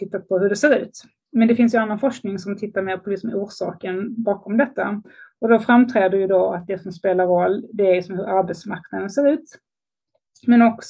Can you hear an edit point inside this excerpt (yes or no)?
no